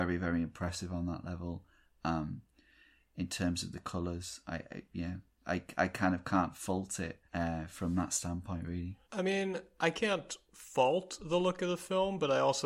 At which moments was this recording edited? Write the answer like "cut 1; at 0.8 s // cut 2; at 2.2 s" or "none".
cut 1; at 7.3 s // cut 2; at 9.0 s